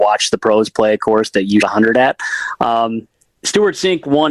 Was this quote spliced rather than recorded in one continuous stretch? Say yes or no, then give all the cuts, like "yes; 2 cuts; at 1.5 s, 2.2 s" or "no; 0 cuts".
yes; 2 cuts; at 1.6 s, 3.3 s